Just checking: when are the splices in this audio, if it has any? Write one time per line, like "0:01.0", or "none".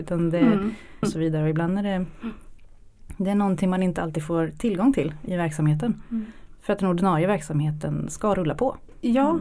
0:01.0
0:05.3